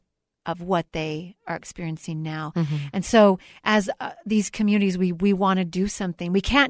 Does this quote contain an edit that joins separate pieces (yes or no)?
no